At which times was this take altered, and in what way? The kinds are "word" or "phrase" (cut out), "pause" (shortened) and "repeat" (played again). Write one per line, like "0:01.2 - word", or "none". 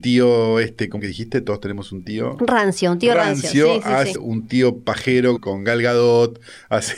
0:01.0 - word
0:04.1 - word
0:05.4 - word